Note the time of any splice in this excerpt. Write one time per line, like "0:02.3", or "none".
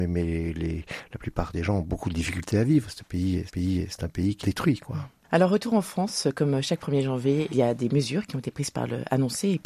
0:03.5
0:04.4